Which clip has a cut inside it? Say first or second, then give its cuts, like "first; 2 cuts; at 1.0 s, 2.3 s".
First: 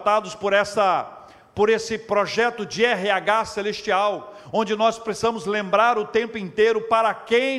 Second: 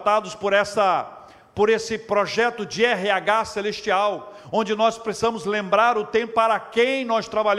second; 1 cut; at 6.3 s